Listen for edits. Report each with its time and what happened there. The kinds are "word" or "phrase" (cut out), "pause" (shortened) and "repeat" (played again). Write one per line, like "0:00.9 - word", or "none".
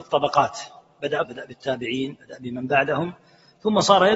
0:01.2 - word